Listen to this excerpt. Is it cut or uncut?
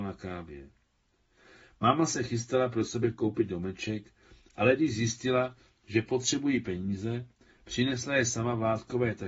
uncut